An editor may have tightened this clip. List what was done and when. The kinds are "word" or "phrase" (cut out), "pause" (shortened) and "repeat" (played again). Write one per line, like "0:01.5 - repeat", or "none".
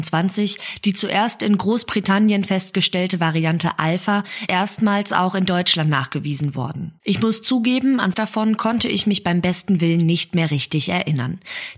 0:04.5 - word
0:07.0 - pause
0:08.1 - word